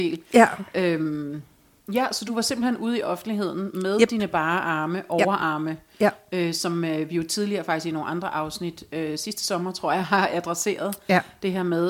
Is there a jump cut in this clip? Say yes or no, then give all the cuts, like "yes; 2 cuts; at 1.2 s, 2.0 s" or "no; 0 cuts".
no; 0 cuts